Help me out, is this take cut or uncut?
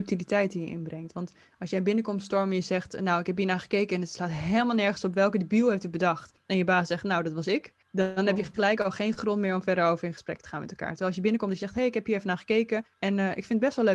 cut